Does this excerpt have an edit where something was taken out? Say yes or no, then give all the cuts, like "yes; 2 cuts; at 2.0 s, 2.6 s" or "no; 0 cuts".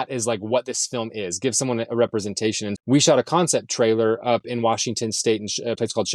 yes; 1 cut; at 2.7 s